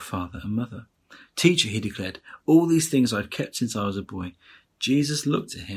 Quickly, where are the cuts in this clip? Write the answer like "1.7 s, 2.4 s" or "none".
none

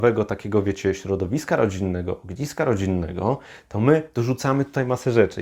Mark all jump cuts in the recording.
none

